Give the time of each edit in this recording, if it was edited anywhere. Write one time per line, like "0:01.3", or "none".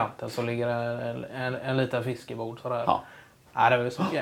none